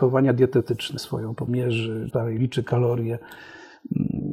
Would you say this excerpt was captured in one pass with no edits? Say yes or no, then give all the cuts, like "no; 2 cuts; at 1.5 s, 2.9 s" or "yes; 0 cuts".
no; 3 cuts; at 1.0 s, 1.5 s, 2.1 s